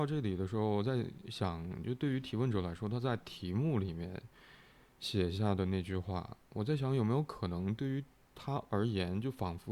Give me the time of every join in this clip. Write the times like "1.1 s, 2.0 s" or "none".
none